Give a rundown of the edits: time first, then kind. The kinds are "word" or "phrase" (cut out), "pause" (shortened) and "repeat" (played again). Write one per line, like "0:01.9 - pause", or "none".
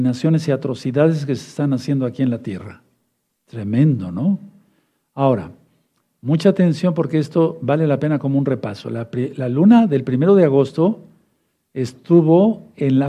none